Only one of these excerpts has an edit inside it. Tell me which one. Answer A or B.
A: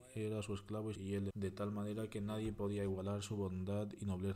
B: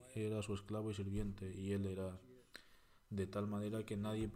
A